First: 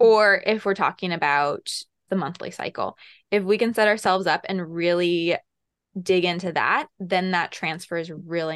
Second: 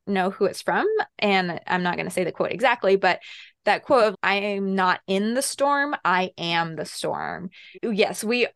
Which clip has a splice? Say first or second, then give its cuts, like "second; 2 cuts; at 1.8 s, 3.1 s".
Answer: first; 1 cut; at 2.1 s